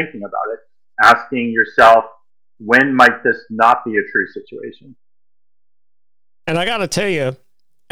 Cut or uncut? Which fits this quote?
uncut